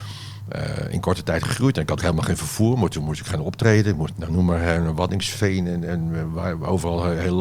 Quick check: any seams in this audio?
yes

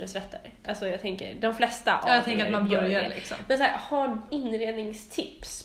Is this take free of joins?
no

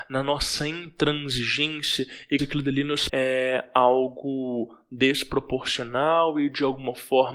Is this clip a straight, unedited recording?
no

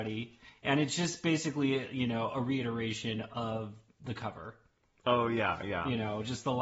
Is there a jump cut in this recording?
no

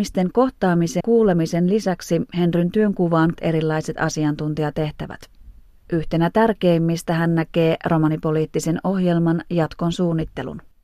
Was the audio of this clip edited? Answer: yes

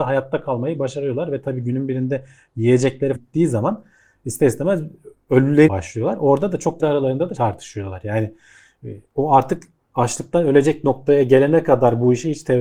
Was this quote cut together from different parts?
yes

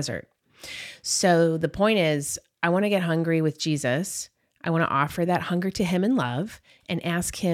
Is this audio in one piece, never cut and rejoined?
yes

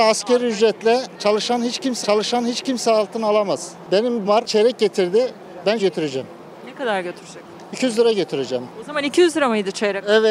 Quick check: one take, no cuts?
no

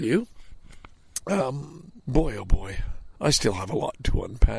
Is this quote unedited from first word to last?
no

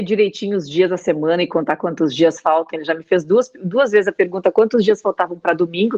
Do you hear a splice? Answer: no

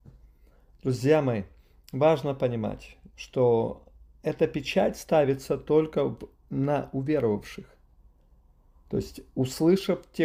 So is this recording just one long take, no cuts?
yes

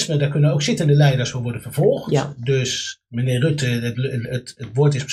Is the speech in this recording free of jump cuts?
yes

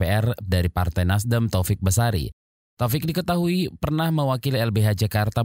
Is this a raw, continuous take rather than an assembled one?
yes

